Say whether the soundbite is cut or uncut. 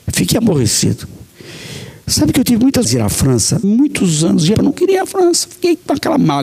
cut